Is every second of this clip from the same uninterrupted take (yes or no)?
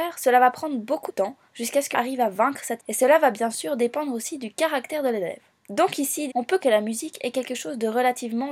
no